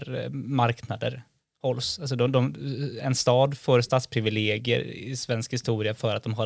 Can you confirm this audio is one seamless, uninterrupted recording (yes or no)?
no